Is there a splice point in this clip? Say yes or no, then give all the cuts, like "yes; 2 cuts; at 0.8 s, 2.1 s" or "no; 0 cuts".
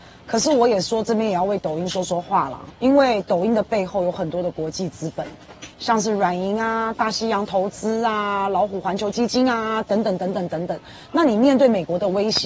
yes; 2 cuts; at 2.7 s, 5.7 s